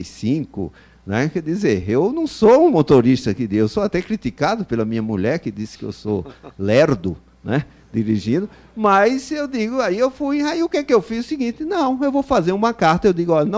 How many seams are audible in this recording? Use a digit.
0